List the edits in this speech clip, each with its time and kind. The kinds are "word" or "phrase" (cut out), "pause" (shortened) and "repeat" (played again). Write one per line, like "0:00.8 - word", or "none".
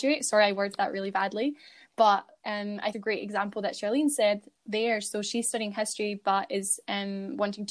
0:02.9 - phrase